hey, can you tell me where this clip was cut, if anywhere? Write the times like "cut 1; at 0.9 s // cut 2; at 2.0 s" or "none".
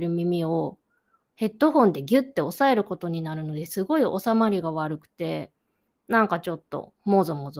none

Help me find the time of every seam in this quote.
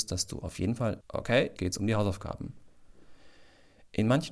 cut 1; at 1.0 s // cut 2; at 1.6 s

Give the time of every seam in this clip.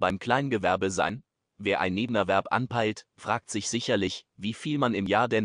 none

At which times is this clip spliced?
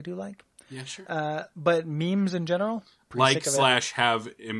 none

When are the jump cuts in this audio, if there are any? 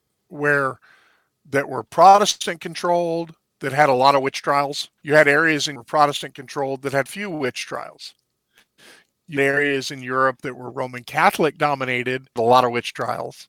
cut 1; at 5.0 s // cut 2; at 5.8 s // cut 3; at 7.1 s // cut 4; at 9.4 s // cut 5; at 12.4 s

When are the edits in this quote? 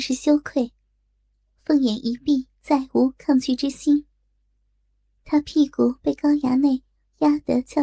cut 1; at 2.6 s

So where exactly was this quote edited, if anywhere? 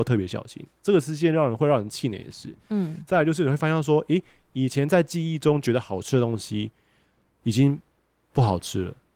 none

